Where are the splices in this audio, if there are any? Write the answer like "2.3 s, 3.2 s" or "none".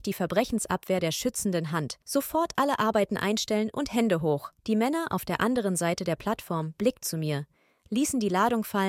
2.0 s, 4.6 s, 7.0 s